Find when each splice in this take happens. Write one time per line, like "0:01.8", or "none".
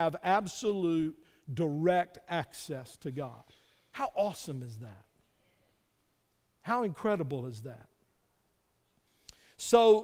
none